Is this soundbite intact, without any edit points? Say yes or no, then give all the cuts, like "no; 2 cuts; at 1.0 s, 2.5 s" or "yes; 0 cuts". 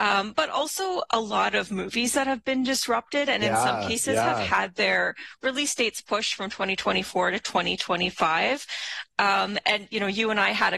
yes; 0 cuts